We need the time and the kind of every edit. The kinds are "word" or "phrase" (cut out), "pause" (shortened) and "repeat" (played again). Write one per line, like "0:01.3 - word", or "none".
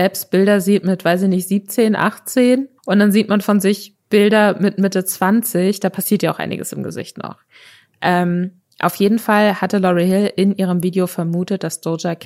0:02.8 - pause